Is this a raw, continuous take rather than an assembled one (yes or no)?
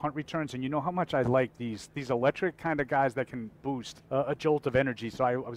no